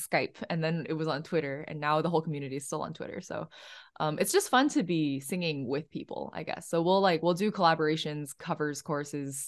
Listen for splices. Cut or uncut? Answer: uncut